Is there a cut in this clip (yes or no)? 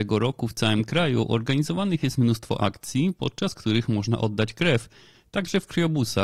no